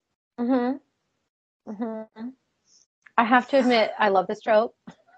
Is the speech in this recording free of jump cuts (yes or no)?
yes